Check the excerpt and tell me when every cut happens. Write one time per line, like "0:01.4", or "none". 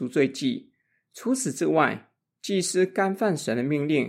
none